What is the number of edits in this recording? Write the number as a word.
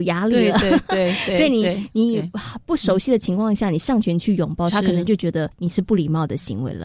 one